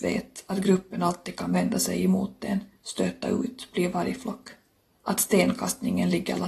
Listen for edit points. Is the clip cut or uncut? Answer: uncut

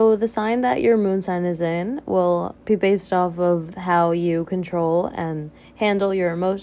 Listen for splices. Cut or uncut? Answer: cut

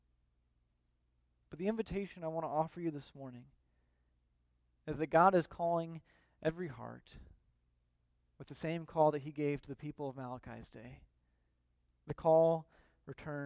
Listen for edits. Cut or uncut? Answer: uncut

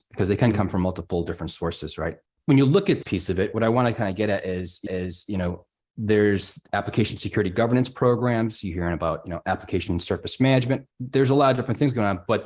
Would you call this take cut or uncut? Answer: cut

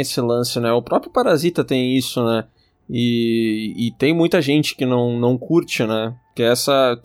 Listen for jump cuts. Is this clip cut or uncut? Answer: uncut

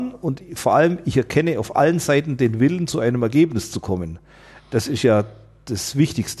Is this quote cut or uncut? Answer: uncut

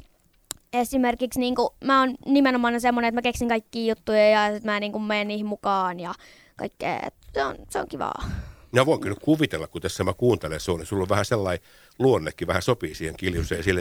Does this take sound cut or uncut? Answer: uncut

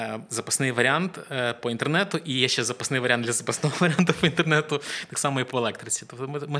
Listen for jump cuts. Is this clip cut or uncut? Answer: uncut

